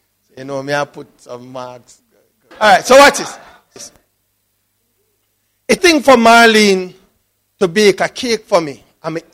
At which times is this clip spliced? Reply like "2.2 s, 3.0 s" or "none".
2.5 s, 3.8 s, 5.8 s